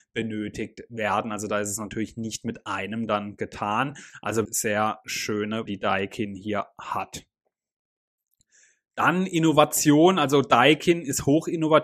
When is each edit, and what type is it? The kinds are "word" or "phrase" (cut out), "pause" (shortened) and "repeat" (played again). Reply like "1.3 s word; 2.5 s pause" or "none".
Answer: 4.4 s word; 5.7 s word